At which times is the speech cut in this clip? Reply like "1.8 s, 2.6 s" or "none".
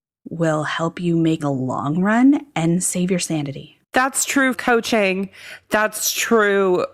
1.4 s, 3.8 s, 4.5 s